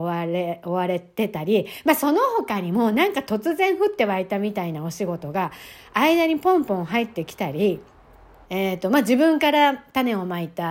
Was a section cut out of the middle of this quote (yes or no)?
yes